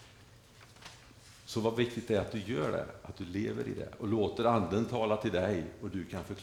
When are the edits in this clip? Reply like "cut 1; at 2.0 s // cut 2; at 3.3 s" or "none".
none